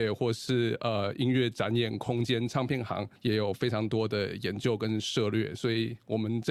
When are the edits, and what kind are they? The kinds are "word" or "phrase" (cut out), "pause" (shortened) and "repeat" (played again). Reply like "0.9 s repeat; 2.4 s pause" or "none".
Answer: 3.2 s pause